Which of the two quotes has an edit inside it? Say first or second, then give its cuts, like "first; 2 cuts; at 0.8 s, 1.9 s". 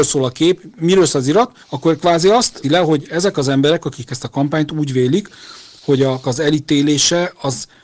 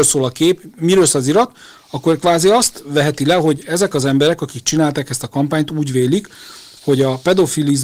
first; 4 cuts; at 1.6 s, 2.6 s, 4.1 s, 6.2 s